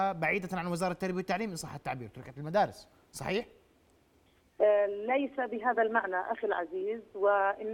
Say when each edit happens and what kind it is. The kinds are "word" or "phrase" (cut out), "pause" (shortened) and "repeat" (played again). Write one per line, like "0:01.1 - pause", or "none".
none